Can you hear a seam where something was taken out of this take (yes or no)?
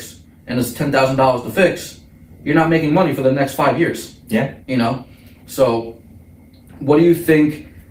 yes